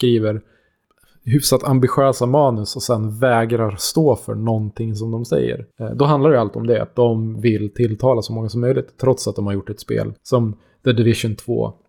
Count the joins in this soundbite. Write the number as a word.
two